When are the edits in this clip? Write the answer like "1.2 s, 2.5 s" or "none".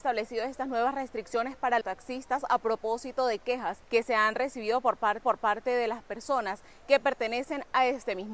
1.8 s, 3.8 s, 5.2 s